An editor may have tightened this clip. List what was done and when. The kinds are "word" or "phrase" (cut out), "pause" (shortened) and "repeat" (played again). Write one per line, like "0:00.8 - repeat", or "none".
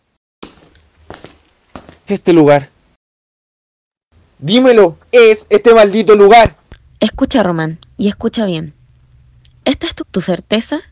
0:02.1 - word
0:05.1 - word
0:10.0 - word